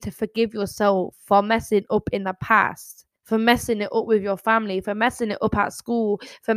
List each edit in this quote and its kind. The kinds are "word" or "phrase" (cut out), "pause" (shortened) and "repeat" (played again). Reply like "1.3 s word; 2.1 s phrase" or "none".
3.2 s pause